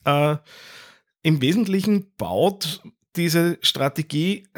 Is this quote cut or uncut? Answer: uncut